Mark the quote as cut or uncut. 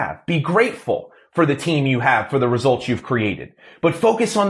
uncut